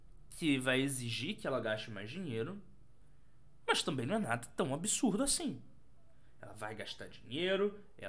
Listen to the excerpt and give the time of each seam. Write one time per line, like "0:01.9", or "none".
none